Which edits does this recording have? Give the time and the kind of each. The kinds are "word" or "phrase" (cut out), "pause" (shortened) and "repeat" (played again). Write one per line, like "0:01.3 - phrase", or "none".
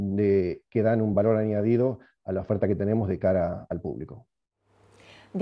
none